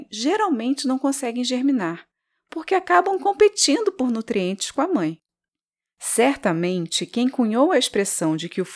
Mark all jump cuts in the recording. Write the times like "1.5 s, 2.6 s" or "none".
none